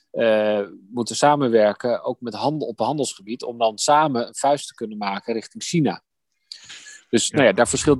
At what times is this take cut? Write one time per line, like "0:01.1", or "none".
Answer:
none